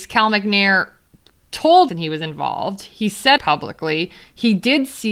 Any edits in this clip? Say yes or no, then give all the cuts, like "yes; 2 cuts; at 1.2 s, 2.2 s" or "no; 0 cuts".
yes; 2 cuts; at 1.9 s, 3.4 s